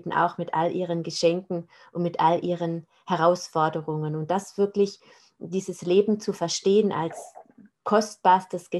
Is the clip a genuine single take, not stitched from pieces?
yes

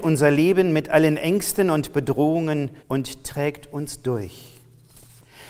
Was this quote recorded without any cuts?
no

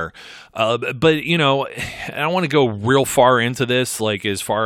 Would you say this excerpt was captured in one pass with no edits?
yes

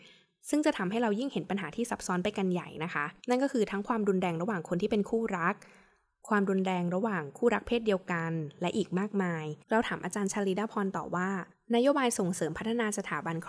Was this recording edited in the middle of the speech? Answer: yes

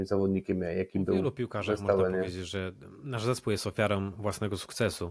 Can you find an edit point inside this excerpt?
no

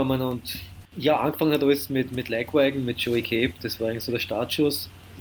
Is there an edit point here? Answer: no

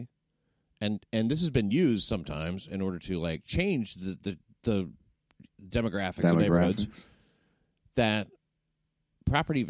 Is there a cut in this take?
no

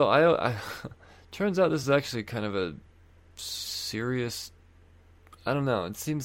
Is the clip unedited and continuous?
yes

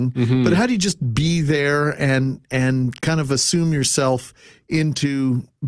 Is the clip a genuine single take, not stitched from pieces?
yes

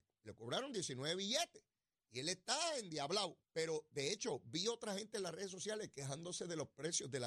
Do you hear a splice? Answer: yes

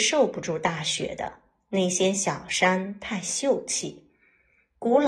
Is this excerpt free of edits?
yes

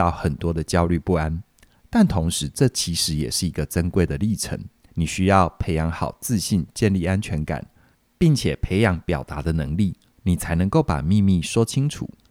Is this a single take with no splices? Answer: no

